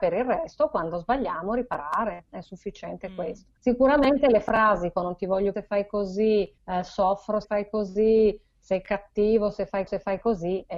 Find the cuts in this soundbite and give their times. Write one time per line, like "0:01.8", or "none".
0:03.6
0:05.0
0:05.5
0:06.6
0:07.4
0:09.9